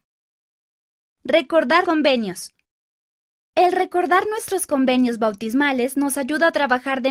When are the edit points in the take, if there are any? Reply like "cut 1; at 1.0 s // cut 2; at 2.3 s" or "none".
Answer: cut 1; at 1.8 s